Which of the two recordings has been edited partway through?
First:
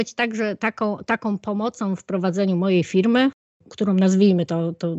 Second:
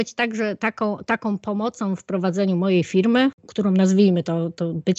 second; 1 cut; at 3.4 s

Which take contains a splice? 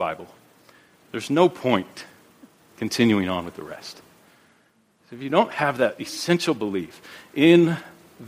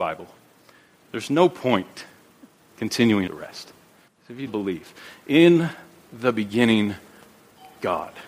second; 3 cuts; at 3.3 s, 4.1 s, 4.5 s

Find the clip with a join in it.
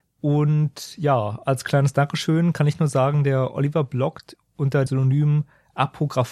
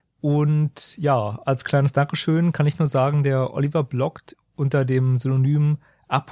first; 1 cut; at 4.9 s

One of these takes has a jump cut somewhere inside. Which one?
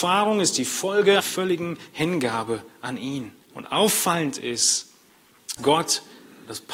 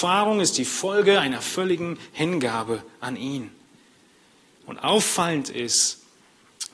first; 3 cuts; at 1.2 s, 3.4 s, 5.6 s

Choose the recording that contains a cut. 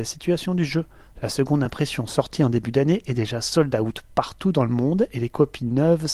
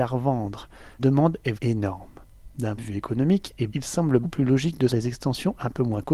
second; 6 cuts; at 1.0 s, 1.5 s, 2.8 s, 3.7 s, 4.2 s, 4.9 s

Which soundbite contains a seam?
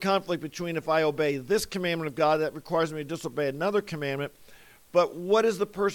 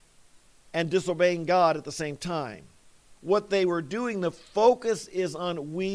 second; 1 cut; at 3.2 s

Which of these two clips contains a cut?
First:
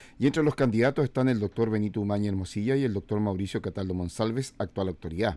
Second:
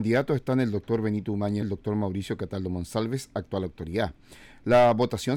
second; 1 cut; at 1.6 s

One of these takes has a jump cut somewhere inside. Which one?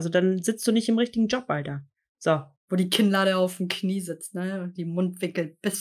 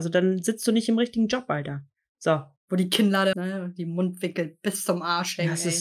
second; 1 cut; at 3.3 s

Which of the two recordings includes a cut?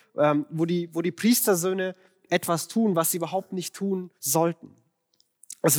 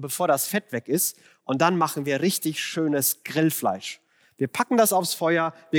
first; 1 cut; at 4.2 s

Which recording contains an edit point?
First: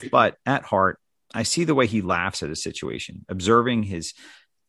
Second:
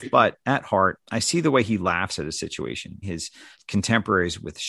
second; 3 cuts; at 1.0 s, 3.0 s, 3.5 s

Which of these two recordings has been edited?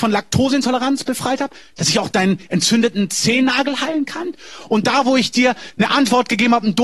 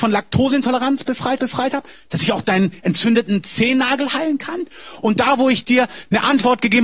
second; 1 cut; at 1.4 s

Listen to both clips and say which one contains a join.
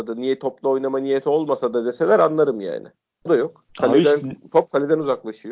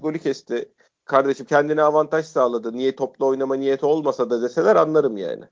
first; 2 cuts; at 3.3 s, 3.7 s

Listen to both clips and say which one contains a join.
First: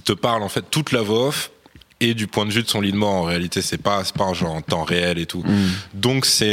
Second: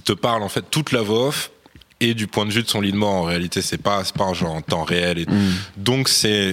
second; 1 cut; at 5.3 s

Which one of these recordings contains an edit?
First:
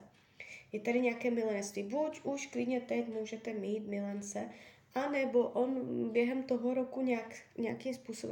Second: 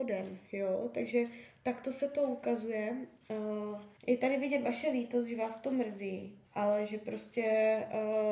second; 2 cuts; at 4.0 s, 6.5 s

